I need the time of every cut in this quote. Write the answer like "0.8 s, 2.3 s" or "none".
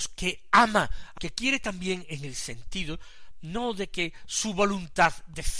1.2 s